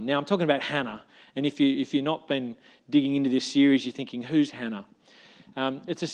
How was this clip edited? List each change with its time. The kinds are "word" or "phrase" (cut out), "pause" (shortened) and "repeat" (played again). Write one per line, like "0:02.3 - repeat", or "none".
none